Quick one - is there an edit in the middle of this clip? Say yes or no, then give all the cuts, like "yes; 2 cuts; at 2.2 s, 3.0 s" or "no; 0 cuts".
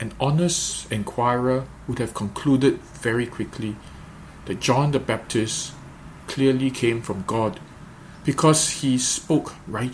no; 0 cuts